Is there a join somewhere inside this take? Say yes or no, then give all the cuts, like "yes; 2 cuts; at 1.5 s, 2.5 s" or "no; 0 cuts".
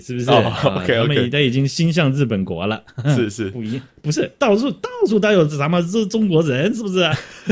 no; 0 cuts